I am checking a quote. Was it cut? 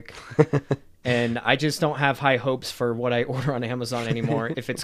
no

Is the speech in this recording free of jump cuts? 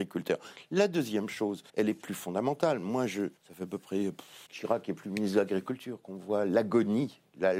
no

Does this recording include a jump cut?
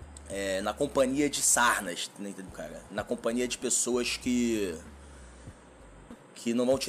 yes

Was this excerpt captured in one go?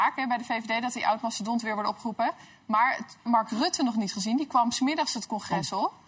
no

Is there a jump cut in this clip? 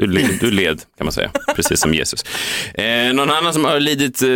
no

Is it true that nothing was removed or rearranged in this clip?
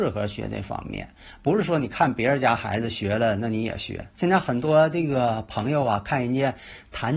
no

